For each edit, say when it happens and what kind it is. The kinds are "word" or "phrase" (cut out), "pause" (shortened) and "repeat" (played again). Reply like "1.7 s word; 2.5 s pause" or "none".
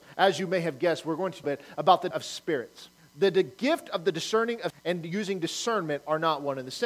1.4 s phrase; 2.1 s word; 3.0 s pause; 4.7 s word